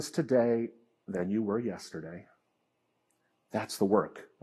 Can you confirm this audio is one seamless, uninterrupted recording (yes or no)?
yes